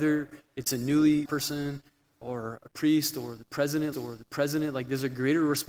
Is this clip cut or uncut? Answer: cut